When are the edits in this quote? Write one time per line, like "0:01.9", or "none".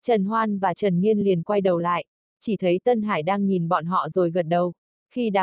none